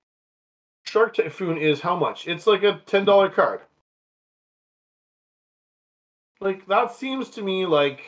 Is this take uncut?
yes; 0 cuts

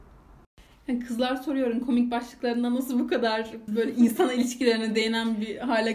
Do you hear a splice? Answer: yes; 1 cut; at 3.7 s

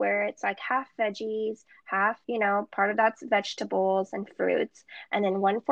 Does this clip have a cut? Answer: yes; 1 cut; at 2.2 s

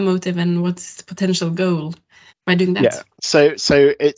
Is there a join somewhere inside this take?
yes; 2 cuts; at 2.3 s, 3.1 s

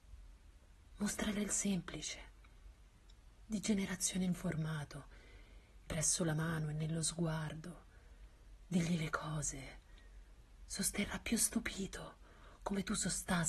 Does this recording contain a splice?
yes; 3 cuts; at 1.4 s, 4.3 s, 5.9 s

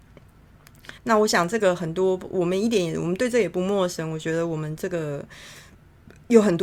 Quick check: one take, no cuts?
no; 1 cut; at 1.0 s

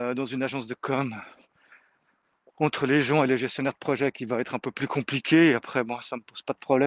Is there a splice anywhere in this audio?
no; 0 cuts

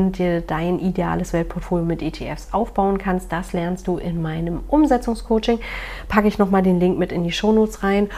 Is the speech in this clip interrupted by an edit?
no; 0 cuts

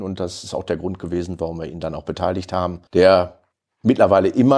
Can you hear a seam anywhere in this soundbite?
yes; 1 cut; at 2.9 s

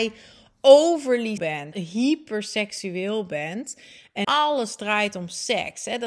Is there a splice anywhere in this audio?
yes; 3 cuts; at 1.4 s, 1.7 s, 4.2 s

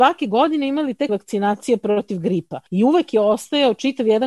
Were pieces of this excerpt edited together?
yes; 2 cuts; at 1.1 s, 2.7 s

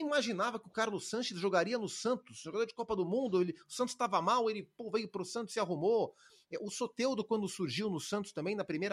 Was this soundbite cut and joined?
no; 0 cuts

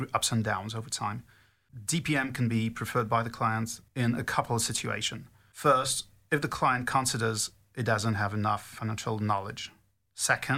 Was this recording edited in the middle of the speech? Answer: no; 0 cuts

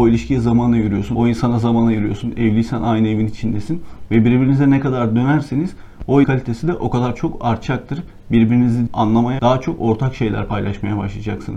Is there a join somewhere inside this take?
yes; 3 cuts; at 6.2 s, 8.9 s, 9.4 s

